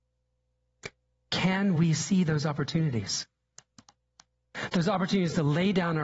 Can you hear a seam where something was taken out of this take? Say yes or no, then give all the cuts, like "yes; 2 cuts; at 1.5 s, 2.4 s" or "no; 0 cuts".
no; 0 cuts